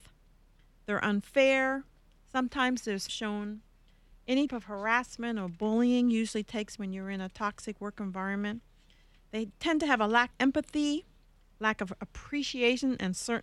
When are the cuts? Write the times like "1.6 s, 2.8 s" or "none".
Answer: 3.1 s, 4.5 s, 6.8 s, 10.3 s